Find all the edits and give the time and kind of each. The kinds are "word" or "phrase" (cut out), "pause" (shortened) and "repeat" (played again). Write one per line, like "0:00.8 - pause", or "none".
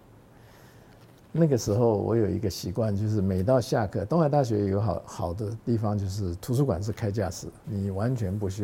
0:07.6 - word